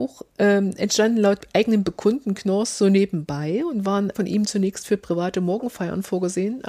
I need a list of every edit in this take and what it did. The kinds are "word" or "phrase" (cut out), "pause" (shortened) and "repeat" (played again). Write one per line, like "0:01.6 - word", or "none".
0:04.1 - word

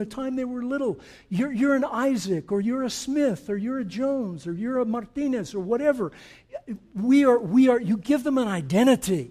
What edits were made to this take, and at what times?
none

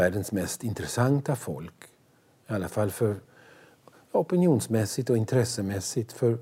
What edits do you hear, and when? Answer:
none

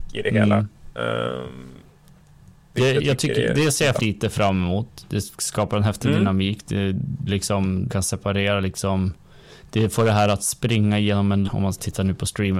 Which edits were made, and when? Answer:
0:03.9 - word
0:07.3 - word
0:07.9 - word
0:11.5 - word

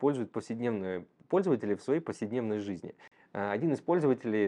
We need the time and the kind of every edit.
none

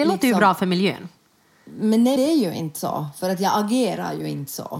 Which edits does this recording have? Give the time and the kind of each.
0:02.2 - word

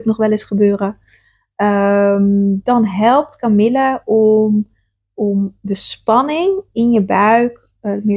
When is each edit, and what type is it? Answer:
none

